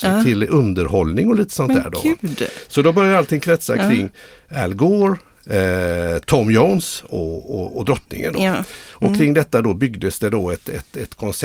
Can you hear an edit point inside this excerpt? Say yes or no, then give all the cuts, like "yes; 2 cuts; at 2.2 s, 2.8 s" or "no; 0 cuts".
no; 0 cuts